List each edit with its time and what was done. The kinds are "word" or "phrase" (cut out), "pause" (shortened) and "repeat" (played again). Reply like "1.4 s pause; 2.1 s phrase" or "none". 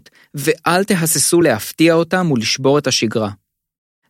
none